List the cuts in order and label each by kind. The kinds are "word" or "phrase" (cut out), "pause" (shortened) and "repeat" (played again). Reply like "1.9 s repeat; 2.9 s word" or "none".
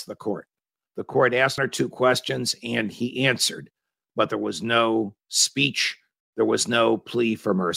1.6 s phrase